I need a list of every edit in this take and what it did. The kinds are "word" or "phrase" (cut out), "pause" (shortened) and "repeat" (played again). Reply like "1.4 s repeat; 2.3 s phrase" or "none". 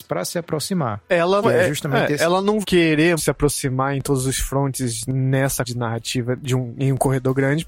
1.4 s word; 2.6 s word; 3.2 s word; 5.6 s word